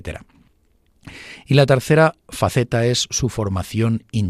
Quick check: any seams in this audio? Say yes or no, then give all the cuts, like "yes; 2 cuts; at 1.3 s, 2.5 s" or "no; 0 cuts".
no; 0 cuts